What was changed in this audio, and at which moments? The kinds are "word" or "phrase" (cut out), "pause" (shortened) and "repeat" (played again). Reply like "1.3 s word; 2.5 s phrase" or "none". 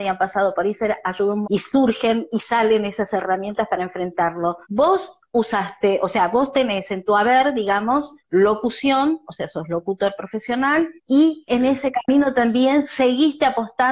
1.4 s word; 4.6 s pause; 8.2 s pause; 11.0 s pause